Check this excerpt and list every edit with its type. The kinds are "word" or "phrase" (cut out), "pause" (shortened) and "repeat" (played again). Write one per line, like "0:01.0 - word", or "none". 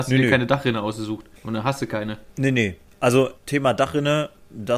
0:01.4 - pause
0:02.3 - pause
0:03.4 - phrase